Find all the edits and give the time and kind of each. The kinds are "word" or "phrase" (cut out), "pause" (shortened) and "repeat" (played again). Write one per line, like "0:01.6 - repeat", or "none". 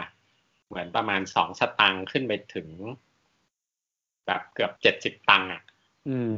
0:04.8 - pause